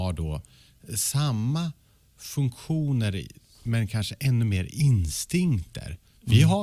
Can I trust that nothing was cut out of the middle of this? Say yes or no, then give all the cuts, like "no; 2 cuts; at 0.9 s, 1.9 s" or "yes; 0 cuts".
yes; 0 cuts